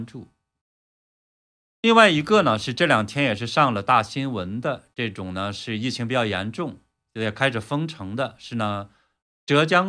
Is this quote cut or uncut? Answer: uncut